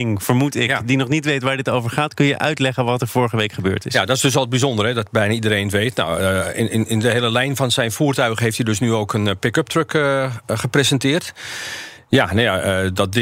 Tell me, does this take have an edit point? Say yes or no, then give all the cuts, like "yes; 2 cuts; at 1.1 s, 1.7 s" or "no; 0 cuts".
no; 0 cuts